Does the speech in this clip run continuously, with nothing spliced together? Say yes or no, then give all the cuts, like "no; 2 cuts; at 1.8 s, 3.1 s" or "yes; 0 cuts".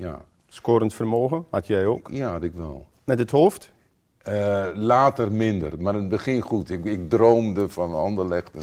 no; 2 cuts; at 3.0 s, 3.9 s